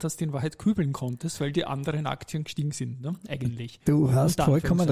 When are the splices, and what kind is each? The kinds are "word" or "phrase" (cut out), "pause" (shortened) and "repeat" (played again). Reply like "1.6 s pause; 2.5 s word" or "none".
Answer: none